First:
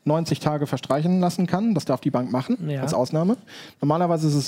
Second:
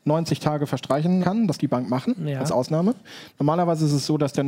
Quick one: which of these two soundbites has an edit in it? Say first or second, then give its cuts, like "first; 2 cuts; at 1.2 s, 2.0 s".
second; 2 cuts; at 1.2 s, 1.6 s